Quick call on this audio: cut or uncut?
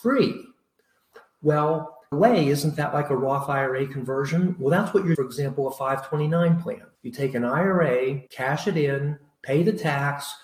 cut